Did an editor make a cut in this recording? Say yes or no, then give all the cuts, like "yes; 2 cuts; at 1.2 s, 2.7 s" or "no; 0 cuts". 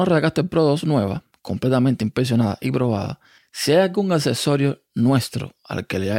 yes; 1 cut; at 3.4 s